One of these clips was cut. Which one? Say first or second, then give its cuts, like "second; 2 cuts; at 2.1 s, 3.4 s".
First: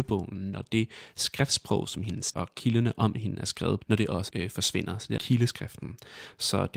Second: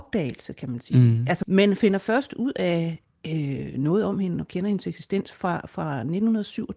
first; 4 cuts; at 2.3 s, 3.8 s, 4.3 s, 5.2 s